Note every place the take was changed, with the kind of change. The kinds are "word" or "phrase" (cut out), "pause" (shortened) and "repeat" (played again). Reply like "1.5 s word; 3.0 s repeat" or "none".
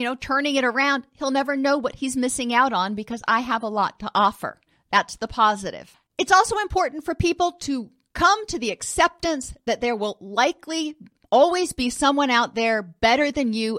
none